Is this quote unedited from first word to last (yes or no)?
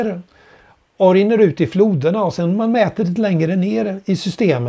yes